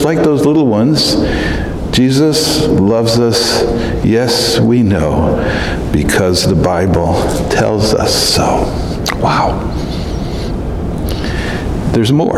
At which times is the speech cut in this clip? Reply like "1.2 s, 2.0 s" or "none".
none